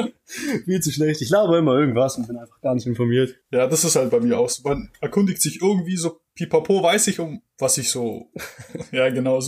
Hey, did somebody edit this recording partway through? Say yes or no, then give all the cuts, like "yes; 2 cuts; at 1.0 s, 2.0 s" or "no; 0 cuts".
yes; 4 cuts; at 3.4 s, 6.3 s, 7.5 s, 8.3 s